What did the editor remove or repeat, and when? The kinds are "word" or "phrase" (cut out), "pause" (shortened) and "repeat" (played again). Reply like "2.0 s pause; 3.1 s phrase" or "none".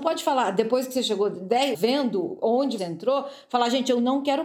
1.7 s phrase; 2.8 s word